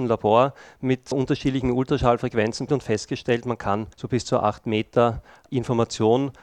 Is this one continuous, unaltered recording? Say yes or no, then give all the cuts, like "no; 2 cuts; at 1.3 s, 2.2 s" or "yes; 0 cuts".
no; 3 cuts; at 1.1 s, 2.7 s, 3.9 s